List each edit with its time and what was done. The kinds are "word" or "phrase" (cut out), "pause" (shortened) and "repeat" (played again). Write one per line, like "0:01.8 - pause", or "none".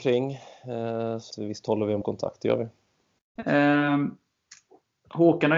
0:01.3 - word
0:02.0 - word